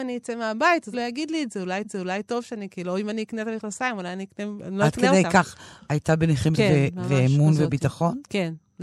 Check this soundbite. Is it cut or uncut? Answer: cut